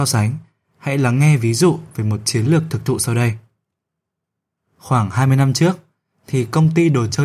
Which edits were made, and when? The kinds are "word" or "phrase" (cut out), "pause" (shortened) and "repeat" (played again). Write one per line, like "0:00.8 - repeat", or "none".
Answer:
none